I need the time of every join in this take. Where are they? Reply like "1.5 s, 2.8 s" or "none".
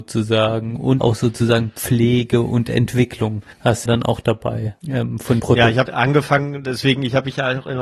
1.0 s, 3.5 s, 3.9 s, 4.8 s, 5.4 s, 5.9 s

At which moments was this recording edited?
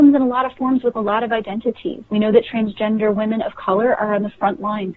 2.1 s

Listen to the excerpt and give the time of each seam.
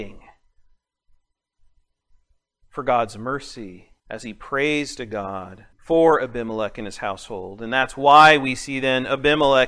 4.0 s, 5.7 s

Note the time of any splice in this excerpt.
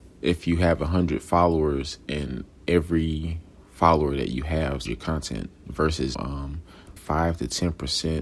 2.6 s, 4.9 s, 6.1 s, 7.0 s

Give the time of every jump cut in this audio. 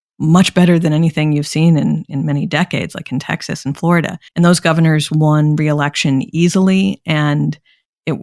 4.3 s

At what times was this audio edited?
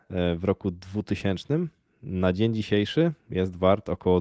none

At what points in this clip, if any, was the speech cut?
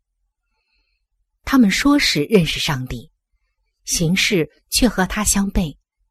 none

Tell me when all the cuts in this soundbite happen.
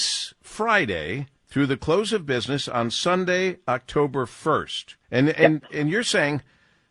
1.4 s, 5.0 s

